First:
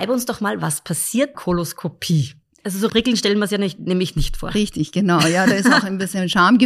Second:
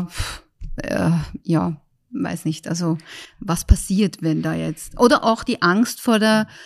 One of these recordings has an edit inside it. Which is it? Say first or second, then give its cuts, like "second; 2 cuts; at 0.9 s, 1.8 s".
first; 3 cuts; at 1.3 s, 2.4 s, 2.9 s